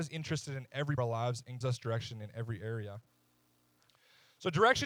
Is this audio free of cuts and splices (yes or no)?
no